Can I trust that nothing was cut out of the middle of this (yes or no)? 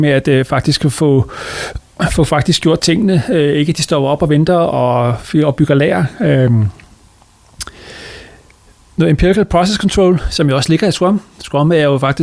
yes